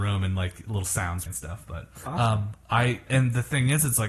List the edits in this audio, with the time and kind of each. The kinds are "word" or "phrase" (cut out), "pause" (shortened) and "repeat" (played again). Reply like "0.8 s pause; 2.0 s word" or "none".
1.3 s word; 2.1 s word; 3.1 s word